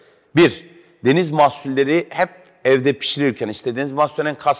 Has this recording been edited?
no; 0 cuts

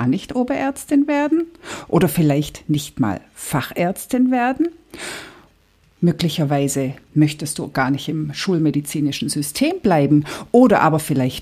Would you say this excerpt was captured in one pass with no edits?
yes; 0 cuts

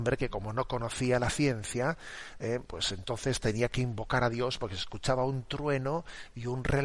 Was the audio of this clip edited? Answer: no; 0 cuts

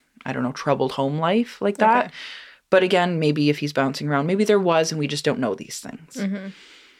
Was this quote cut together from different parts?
no; 0 cuts

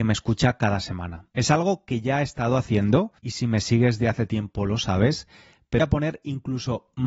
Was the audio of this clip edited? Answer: yes; 3 cuts; at 1.3 s, 3.2 s, 5.8 s

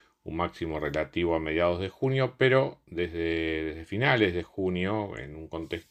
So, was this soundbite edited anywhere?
no; 0 cuts

